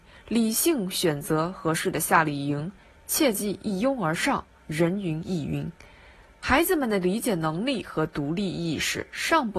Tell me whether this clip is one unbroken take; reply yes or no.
yes